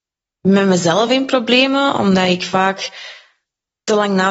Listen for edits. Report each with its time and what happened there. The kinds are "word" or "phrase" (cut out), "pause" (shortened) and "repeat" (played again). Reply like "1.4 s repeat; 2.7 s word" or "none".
none

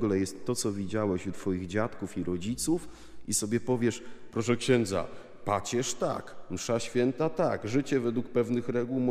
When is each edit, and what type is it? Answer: none

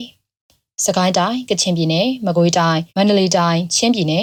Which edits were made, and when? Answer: 2.9 s pause

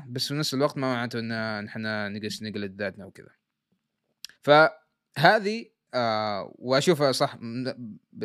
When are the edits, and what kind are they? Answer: 4.3 s pause

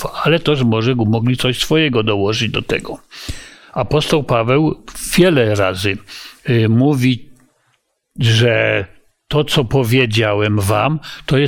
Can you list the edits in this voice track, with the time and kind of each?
none

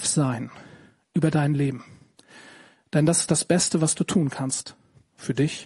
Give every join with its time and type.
none

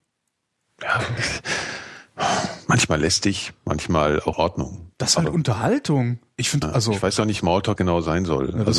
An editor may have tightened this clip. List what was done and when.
1.2 s word; 4.3 s word; 6.6 s word; 7.4 s word; 7.8 s word

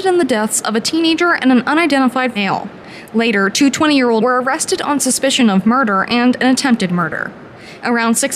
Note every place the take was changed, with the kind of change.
2.4 s word; 4.2 s word

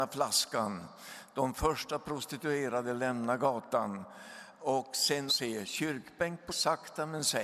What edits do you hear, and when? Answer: 5.3 s word; 6.5 s word

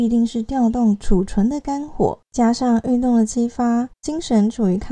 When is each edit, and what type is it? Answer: 2.2 s pause; 3.9 s pause

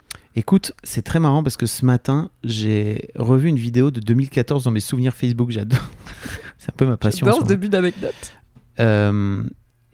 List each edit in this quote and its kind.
none

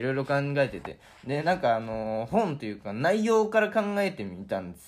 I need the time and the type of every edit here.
none

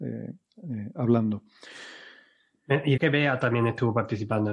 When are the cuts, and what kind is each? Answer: 3.0 s word

